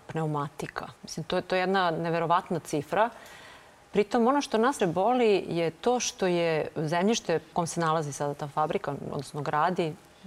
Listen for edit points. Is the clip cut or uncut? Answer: cut